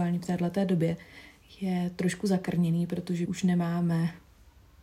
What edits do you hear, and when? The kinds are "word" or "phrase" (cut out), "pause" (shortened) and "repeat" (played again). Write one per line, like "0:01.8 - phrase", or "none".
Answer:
0:03.3 - word